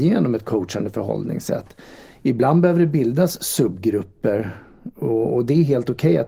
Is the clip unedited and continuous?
yes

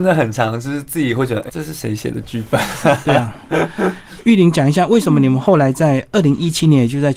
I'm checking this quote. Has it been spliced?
yes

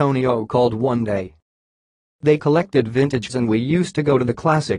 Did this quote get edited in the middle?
yes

